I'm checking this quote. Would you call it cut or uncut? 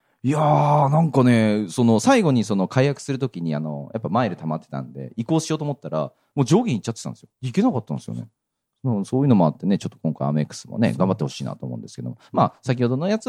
cut